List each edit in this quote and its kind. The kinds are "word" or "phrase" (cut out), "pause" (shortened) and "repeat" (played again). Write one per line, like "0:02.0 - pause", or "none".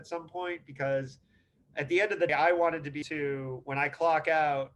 0:02.3 - word
0:03.0 - word

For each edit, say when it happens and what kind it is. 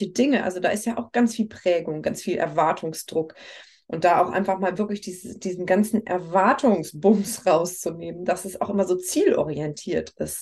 none

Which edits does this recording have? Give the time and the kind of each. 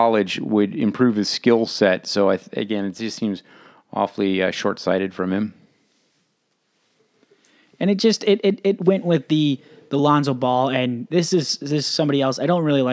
none

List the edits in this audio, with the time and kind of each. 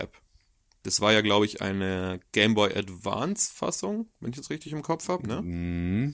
none

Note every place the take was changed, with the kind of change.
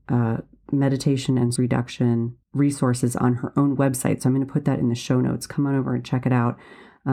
0:01.6 - word
0:02.4 - pause

